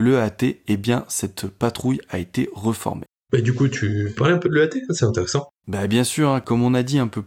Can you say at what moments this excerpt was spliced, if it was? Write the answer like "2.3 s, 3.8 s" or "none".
4.2 s, 5.6 s